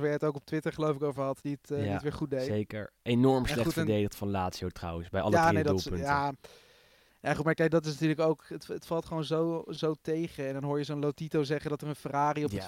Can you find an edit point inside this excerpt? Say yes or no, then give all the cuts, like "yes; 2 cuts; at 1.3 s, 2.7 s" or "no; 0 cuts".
no; 0 cuts